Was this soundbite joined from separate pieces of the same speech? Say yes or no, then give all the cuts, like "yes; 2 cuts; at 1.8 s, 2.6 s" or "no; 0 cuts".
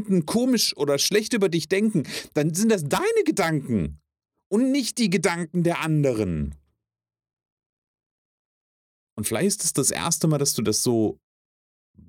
no; 0 cuts